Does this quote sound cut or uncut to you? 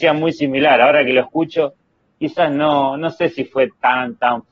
uncut